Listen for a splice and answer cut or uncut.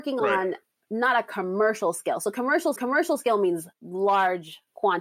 cut